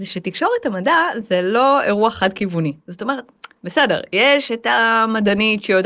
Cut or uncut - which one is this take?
cut